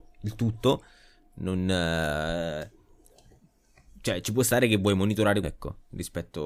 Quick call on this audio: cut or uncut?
cut